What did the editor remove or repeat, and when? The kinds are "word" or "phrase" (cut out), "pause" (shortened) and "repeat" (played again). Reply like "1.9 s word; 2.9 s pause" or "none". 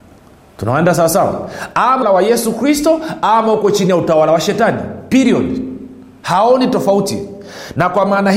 2.0 s phrase